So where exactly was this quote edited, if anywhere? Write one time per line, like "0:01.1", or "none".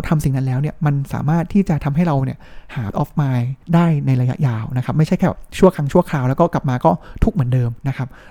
0:02.9
0:03.6